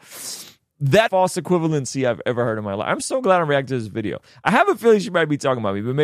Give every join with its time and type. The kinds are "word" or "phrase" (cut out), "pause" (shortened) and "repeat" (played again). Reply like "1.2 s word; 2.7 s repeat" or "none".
1.1 s phrase

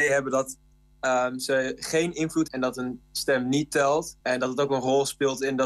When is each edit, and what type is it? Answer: 2.5 s word; 4.2 s pause

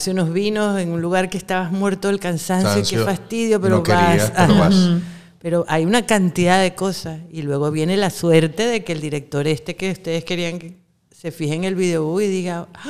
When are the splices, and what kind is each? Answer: none

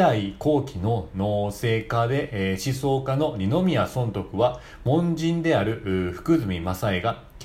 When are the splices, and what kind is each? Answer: none

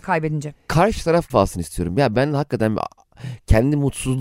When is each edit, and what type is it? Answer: 1.3 s word

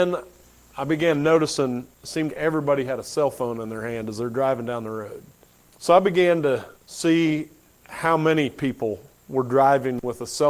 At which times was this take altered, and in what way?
1.9 s pause; 2.3 s word; 5.5 s pause; 6.8 s pause

